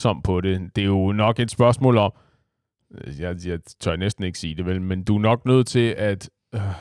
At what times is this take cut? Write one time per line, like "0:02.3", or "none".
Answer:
none